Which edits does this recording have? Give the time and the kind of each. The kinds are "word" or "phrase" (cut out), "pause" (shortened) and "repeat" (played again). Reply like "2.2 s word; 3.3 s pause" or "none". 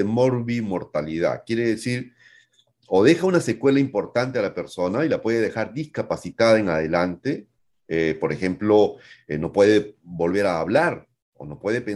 none